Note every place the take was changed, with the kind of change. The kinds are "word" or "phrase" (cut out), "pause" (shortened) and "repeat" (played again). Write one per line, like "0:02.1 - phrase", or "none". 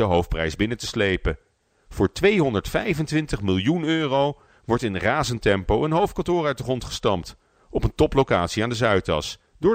none